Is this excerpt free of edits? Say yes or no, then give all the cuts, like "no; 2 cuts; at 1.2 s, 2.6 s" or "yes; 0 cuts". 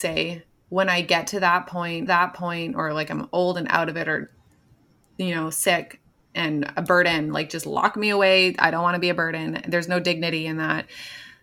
no; 1 cut; at 2.1 s